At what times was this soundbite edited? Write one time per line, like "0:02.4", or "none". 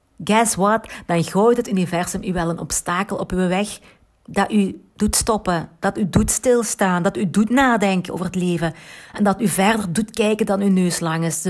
none